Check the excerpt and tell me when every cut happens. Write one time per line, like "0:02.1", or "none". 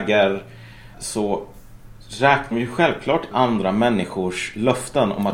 0:00.9
0:02.5
0:03.3